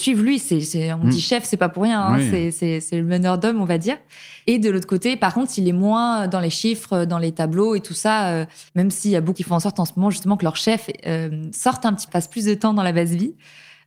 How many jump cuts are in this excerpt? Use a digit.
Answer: 3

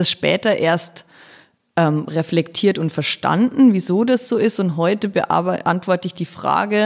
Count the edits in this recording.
0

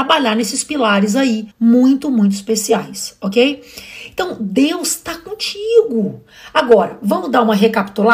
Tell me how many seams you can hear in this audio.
1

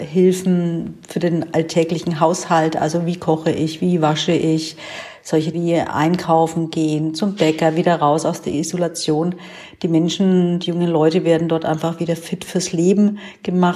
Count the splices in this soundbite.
1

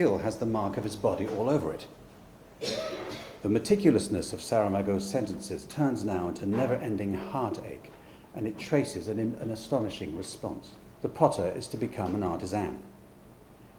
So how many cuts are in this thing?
1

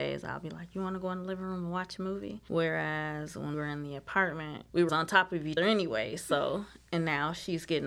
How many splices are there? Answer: 3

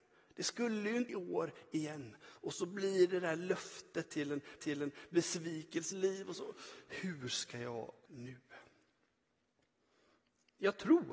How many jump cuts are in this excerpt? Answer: 4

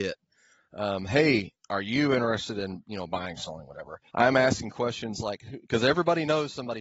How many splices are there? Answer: 1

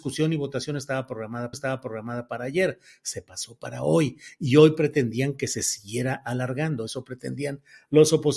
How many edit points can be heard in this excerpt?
1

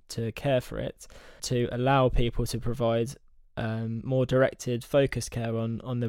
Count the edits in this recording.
1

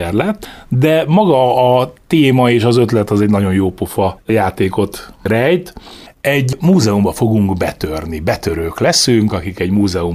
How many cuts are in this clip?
0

